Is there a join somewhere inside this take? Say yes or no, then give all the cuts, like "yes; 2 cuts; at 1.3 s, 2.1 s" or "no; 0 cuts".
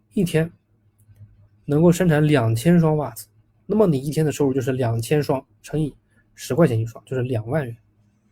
no; 0 cuts